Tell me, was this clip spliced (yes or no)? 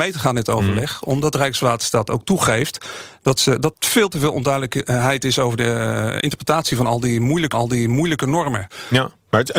yes